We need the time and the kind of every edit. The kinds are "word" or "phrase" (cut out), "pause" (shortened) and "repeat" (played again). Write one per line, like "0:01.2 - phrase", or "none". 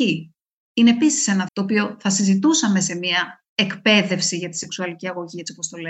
0:01.5 - word
0:03.5 - pause